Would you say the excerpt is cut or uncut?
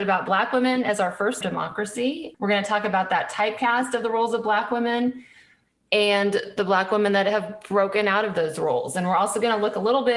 cut